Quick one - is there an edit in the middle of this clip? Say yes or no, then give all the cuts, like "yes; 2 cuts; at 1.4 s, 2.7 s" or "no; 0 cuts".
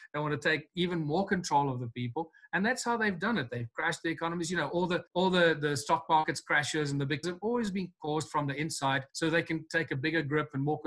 yes; 3 cuts; at 5.1 s, 7.2 s, 9.1 s